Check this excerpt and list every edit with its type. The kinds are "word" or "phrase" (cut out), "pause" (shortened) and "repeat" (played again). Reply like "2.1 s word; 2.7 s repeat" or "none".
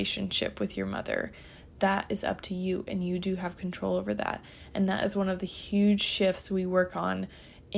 none